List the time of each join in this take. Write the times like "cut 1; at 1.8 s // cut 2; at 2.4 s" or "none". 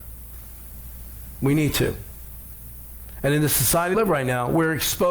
cut 1; at 3.9 s